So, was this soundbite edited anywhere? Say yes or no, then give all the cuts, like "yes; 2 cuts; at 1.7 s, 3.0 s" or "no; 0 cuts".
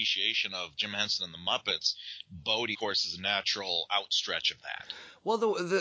yes; 1 cut; at 2.7 s